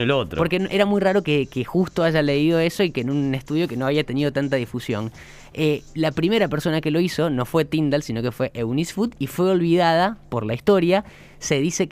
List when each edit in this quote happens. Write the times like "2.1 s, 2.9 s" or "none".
none